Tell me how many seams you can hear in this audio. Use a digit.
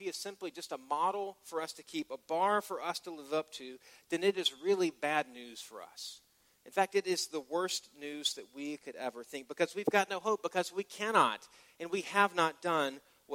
0